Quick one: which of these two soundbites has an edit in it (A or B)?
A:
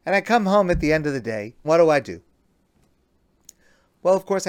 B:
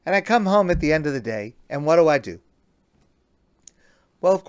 A